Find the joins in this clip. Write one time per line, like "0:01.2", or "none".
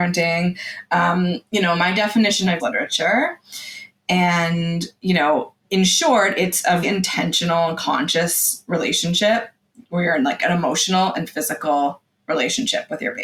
0:02.6
0:05.6
0:06.8